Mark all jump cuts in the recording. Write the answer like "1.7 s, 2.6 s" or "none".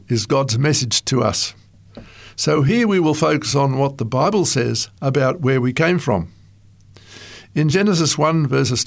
none

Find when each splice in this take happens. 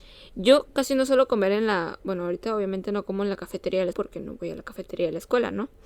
3.9 s

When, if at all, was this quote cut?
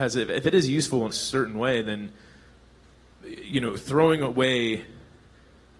1.1 s

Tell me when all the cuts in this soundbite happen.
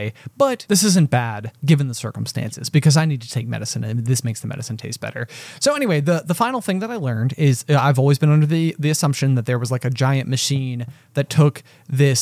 none

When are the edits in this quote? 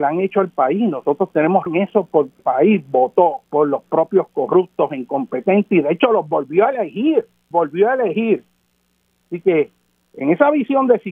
1.7 s, 2.4 s, 3.4 s, 7.5 s

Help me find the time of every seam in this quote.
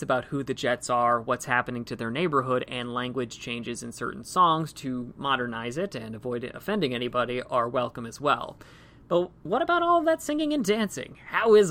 none

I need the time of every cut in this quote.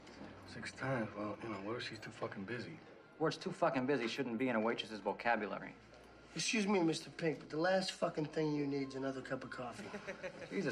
none

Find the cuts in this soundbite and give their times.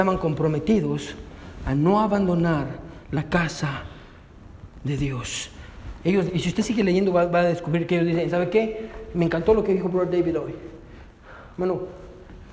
3.0 s, 6.3 s

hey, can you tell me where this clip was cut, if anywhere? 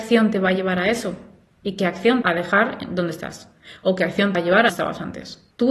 2.2 s, 4.3 s, 4.7 s

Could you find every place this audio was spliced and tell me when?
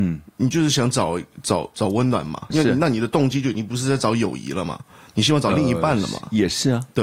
2.5 s

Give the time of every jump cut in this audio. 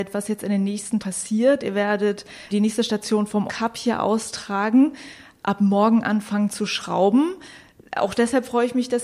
1.0 s, 2.5 s, 3.5 s

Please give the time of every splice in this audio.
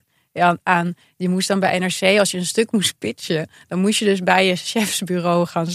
none

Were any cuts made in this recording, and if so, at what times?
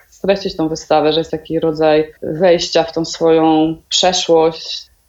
1.3 s, 2.2 s

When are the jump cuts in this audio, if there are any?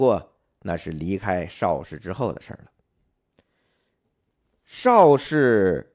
none

